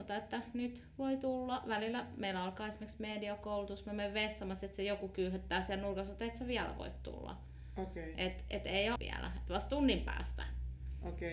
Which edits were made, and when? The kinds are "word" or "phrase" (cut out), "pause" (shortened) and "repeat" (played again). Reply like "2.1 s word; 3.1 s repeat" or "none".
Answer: 9.0 s word